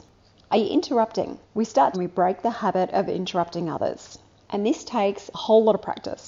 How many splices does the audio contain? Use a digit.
2